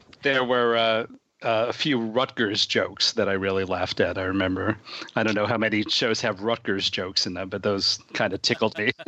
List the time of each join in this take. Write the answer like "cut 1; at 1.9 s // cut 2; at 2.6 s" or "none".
none